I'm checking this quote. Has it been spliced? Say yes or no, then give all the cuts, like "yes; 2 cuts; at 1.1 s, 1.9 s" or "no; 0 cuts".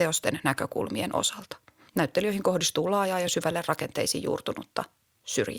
no; 0 cuts